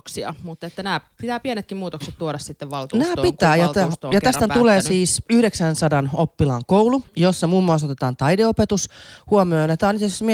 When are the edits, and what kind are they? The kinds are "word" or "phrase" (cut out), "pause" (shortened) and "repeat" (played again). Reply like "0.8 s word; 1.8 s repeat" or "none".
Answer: 7.1 s pause